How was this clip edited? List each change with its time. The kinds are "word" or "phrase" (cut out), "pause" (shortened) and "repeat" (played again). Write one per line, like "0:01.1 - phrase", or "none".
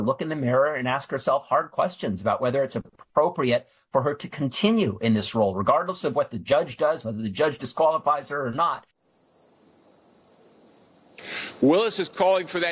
none

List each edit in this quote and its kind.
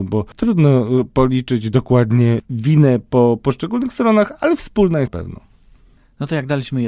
0:05.1 - word

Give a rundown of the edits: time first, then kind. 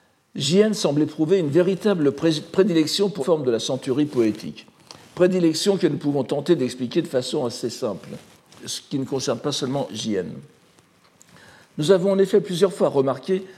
0:03.2 - word
0:08.6 - word
0:09.9 - word

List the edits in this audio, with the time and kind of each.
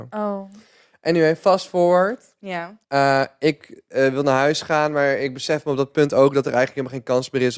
0:02.8 - pause

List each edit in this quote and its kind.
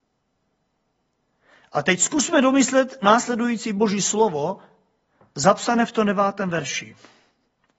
none

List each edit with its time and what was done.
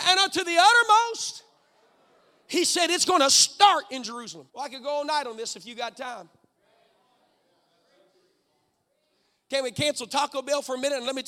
0:04.5 - pause

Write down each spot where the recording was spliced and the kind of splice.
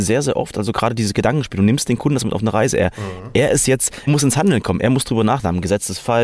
0:04.1 - word

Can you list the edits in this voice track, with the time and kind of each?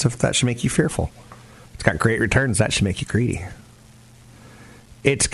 0:01.7 - pause

